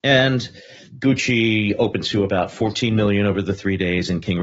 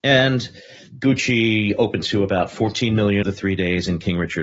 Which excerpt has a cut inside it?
second; 1 cut; at 3.2 s

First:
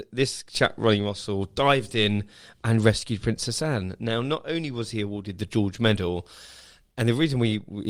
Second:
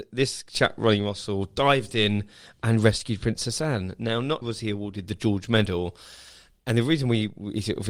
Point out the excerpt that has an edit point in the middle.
second; 1 cut; at 4.4 s

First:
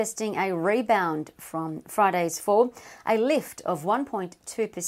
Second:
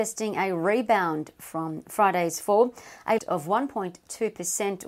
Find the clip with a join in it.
second; 1 cut; at 3.2 s

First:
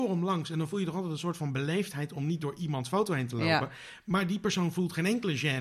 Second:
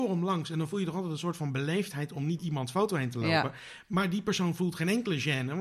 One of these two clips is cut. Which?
second; 1 cut; at 2.4 s

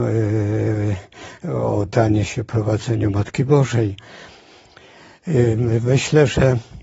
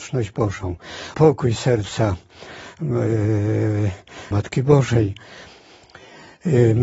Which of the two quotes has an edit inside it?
second; 2 cuts; at 1.1 s, 4.3 s

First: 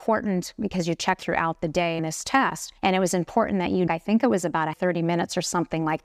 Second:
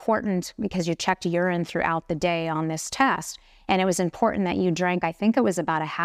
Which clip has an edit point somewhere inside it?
first; 5 cuts; at 1.2 s, 2.0 s, 2.8 s, 3.9 s, 4.7 s

